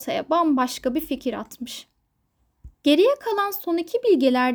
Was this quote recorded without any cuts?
no; 1 cut; at 2.7 s

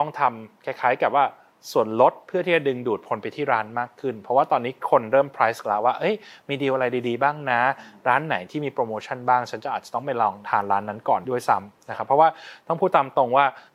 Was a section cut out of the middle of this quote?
yes; 1 cut; at 5.6 s

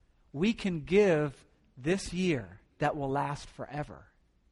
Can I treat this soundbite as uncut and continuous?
no; 1 cut; at 2.7 s

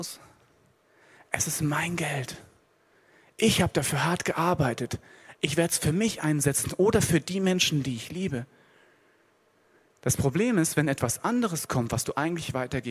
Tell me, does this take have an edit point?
no; 0 cuts

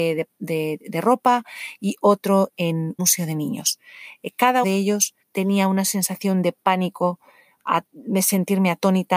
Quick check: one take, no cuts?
no; 4 cuts; at 3.0 s, 4.6 s, 5.2 s, 7.9 s

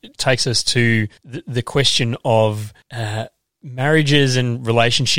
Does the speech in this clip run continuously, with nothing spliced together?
no; 2 cuts; at 1.2 s, 2.8 s

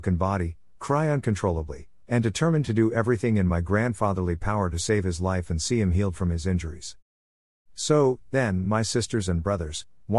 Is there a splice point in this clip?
no; 0 cuts

